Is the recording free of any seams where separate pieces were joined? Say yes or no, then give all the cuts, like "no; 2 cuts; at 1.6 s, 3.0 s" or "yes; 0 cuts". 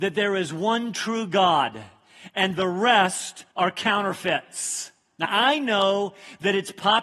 no; 2 cuts; at 3.5 s, 5.2 s